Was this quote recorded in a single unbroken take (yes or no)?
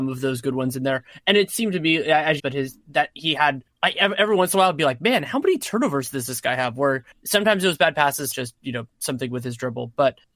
no